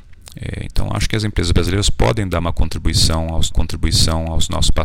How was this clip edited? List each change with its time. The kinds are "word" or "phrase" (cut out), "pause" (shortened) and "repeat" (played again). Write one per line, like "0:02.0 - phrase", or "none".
0:03.5 - repeat